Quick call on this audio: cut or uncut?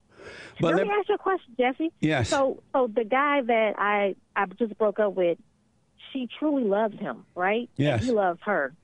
cut